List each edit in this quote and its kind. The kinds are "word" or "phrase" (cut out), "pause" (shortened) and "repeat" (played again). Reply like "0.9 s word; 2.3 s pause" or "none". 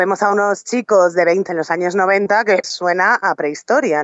1.5 s word; 2.6 s phrase